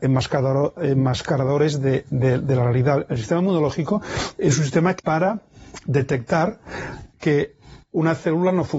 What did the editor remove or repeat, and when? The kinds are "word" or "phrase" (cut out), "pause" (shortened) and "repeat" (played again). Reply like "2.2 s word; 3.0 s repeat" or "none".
5.0 s phrase